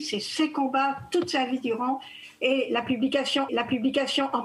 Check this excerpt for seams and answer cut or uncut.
cut